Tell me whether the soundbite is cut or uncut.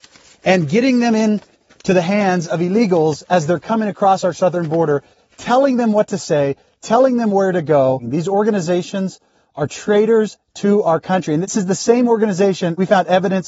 uncut